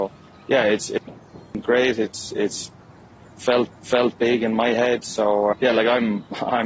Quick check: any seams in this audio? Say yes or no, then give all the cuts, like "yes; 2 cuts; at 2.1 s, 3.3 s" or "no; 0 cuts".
yes; 2 cuts; at 3.7 s, 5.5 s